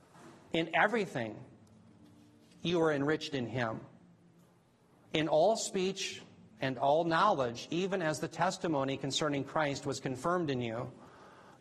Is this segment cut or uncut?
uncut